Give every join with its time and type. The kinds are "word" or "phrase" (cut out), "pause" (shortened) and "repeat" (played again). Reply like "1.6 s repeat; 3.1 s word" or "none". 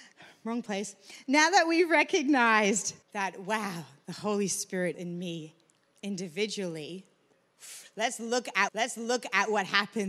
3.0 s pause; 4.9 s word; 8.7 s repeat